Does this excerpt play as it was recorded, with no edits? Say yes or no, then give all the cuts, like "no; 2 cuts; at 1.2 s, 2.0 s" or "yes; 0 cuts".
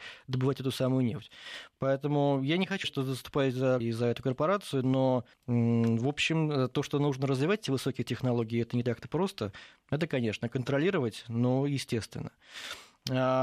no; 3 cuts; at 2.8 s, 3.8 s, 5.3 s